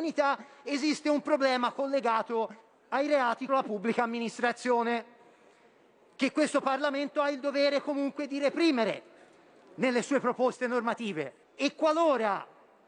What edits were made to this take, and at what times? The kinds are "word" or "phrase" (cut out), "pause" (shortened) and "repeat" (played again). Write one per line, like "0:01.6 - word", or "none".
0:02.6 - pause
0:03.5 - word
0:11.4 - pause